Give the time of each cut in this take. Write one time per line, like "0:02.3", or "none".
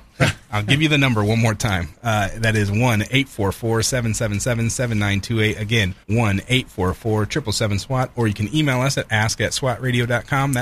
0:06.0